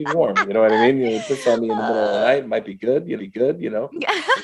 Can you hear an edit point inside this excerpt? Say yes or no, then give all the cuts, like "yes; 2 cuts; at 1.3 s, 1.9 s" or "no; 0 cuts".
yes; 1 cut; at 3.2 s